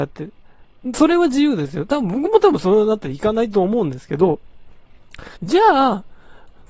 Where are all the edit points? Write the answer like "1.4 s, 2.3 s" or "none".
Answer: 5.4 s

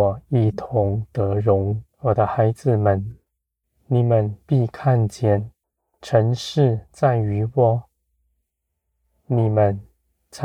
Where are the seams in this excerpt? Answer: 1.9 s, 3.6 s, 5.6 s

